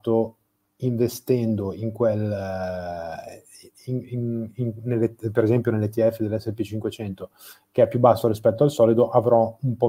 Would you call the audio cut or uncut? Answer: uncut